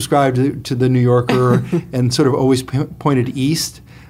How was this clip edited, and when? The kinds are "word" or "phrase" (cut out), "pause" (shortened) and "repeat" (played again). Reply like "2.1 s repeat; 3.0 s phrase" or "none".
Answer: none